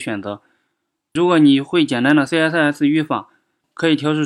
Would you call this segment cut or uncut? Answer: uncut